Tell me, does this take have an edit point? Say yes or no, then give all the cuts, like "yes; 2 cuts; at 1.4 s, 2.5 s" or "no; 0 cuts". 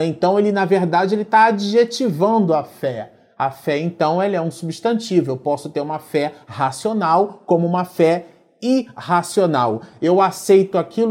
no; 0 cuts